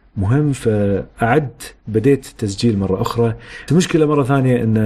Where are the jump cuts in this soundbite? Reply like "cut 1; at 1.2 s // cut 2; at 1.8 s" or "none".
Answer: cut 1; at 1.8 s // cut 2; at 3.7 s